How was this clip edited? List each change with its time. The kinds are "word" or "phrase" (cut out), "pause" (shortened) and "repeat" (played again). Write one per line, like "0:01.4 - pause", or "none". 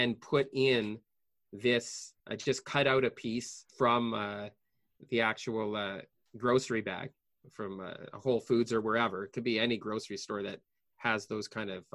0:02.2 - pause
0:03.7 - pause